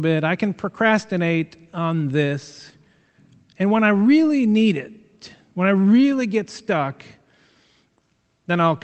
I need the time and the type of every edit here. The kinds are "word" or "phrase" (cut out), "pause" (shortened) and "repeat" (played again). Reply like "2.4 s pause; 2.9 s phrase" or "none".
none